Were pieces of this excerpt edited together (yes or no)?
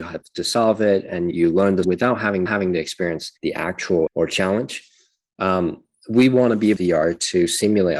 yes